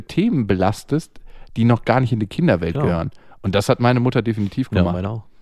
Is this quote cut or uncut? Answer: uncut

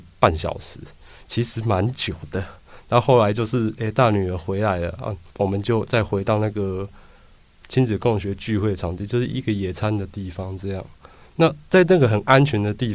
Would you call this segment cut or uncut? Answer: uncut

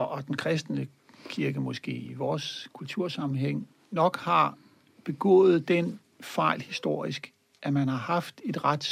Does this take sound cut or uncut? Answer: uncut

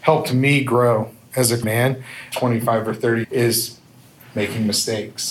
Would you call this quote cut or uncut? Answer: cut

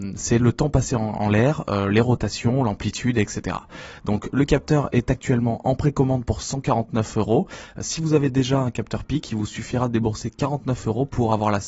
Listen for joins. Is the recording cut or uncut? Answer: uncut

